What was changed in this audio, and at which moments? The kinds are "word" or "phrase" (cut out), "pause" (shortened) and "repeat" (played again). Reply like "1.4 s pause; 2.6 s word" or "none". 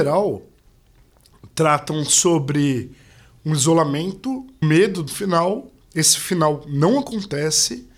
4.6 s word; 5.1 s word; 5.8 s pause